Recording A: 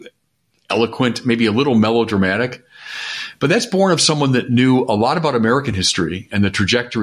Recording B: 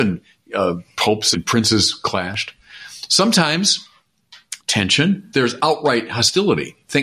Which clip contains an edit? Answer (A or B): B